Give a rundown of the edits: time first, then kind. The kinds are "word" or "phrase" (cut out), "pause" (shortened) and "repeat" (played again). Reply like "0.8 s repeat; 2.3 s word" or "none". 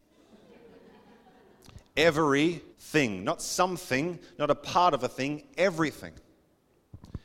2.7 s pause